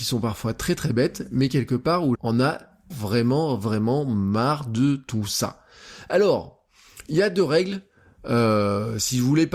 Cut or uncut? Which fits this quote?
cut